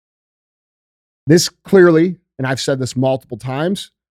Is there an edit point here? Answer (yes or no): no